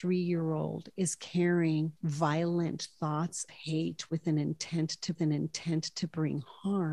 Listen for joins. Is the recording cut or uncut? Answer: cut